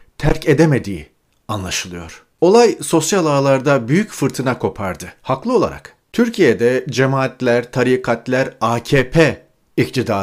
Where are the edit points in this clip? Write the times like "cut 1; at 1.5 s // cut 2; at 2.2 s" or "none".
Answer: cut 1; at 2.3 s // cut 2; at 6.0 s